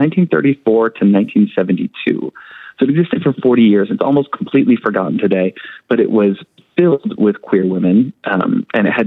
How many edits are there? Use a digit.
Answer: 0